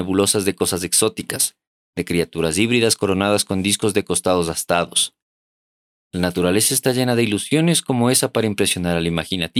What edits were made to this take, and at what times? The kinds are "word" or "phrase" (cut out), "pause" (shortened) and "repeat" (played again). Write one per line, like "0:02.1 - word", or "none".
none